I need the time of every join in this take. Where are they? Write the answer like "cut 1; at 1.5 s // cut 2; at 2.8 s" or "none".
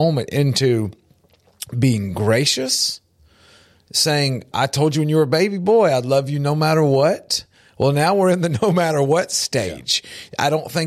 cut 1; at 4.5 s